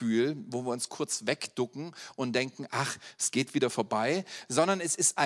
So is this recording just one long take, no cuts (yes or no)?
yes